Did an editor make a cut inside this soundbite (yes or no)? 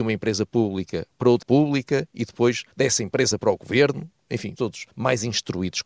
yes